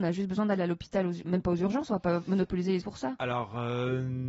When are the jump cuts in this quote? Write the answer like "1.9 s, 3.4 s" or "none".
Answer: 1.2 s, 2.8 s